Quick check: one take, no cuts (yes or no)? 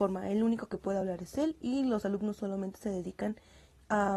yes